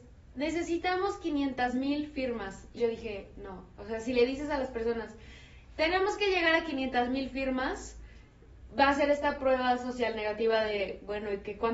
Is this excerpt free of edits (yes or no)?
no